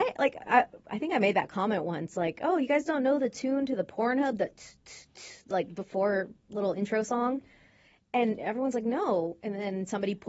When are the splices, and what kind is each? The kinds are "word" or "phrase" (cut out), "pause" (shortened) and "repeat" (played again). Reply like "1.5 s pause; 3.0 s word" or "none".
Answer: none

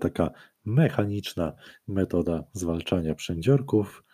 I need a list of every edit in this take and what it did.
none

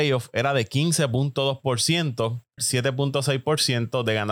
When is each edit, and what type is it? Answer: 2.6 s phrase

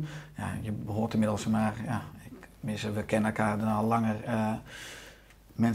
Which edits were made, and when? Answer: none

